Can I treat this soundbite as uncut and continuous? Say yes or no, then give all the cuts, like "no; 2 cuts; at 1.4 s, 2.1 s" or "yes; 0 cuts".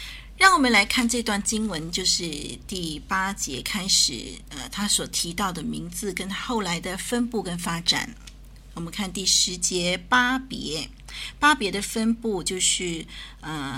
yes; 0 cuts